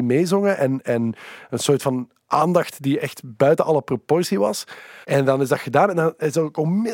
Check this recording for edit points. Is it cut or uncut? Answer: cut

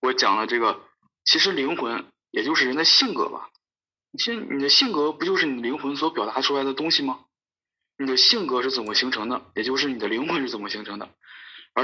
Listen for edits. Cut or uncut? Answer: uncut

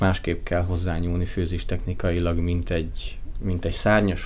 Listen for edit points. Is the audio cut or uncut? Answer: uncut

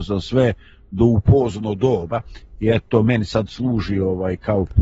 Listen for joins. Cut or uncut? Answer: uncut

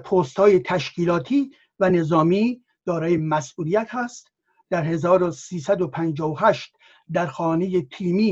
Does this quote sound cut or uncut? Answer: uncut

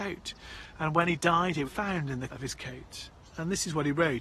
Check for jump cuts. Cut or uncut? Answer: cut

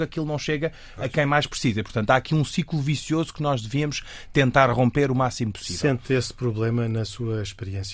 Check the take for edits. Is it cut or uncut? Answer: uncut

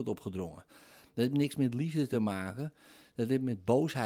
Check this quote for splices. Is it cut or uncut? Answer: uncut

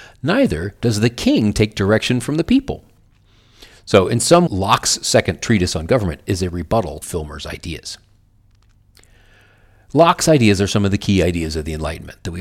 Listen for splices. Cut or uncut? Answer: cut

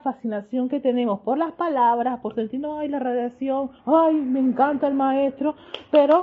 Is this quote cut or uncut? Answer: cut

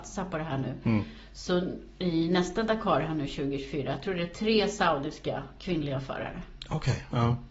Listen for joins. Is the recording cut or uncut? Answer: uncut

